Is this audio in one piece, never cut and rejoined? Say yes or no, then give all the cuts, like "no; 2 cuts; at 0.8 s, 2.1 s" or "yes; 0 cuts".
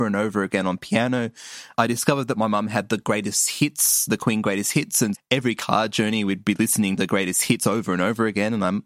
no; 3 cuts; at 1.7 s, 5.1 s, 7.0 s